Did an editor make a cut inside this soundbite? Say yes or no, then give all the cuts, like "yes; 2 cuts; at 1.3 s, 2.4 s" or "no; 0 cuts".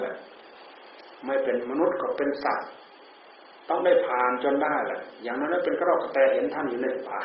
no; 0 cuts